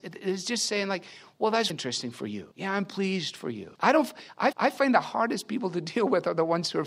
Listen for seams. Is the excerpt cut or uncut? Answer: cut